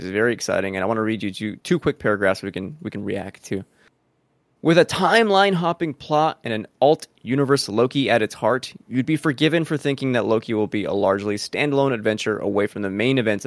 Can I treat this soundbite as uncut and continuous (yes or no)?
yes